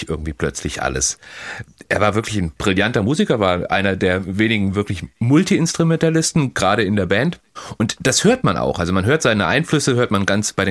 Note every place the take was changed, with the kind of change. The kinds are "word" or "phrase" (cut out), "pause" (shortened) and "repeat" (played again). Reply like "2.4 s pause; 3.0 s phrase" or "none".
none